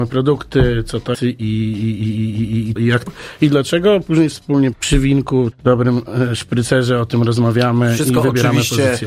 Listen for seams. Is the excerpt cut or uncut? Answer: cut